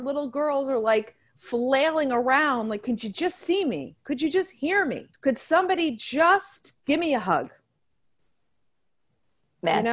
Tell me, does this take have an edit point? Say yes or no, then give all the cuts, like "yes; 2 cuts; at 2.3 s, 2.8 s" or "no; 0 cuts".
yes; 2 cuts; at 5.1 s, 6.8 s